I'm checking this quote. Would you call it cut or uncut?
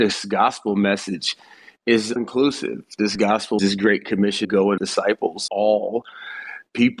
cut